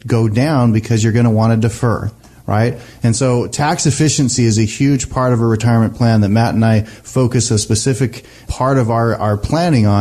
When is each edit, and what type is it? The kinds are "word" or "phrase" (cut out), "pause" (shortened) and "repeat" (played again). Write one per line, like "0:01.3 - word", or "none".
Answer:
none